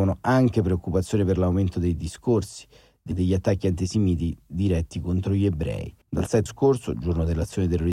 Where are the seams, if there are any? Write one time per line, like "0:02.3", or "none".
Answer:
0:03.1
0:06.0
0:06.5

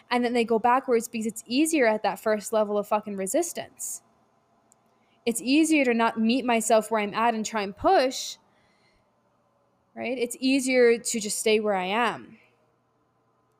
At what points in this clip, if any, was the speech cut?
none

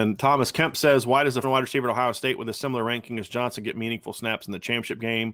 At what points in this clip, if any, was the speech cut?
0:01.4
0:03.3

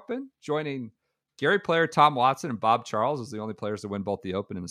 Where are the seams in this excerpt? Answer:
none

